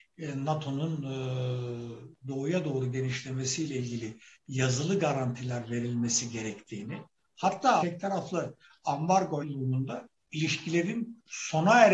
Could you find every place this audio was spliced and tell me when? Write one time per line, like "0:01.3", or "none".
0:07.8
0:09.4